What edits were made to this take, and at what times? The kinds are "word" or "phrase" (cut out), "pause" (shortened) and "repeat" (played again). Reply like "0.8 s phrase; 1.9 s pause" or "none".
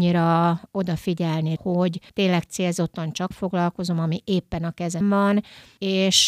1.6 s word; 2.1 s pause; 3.3 s word; 5.0 s word